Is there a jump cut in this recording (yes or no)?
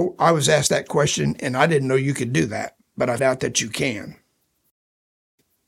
yes